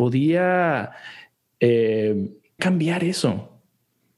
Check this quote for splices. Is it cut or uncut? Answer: cut